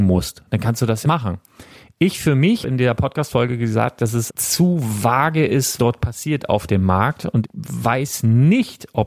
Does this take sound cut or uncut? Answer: cut